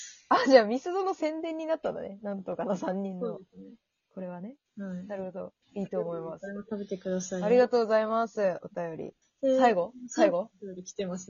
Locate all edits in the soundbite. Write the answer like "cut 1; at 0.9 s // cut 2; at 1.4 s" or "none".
cut 1; at 4.7 s // cut 2; at 5.6 s // cut 3; at 9.2 s